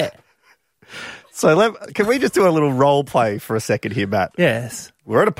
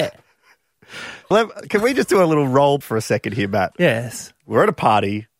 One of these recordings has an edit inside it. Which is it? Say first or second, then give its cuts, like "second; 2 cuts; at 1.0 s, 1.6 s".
second; 2 cuts; at 1.3 s, 2.8 s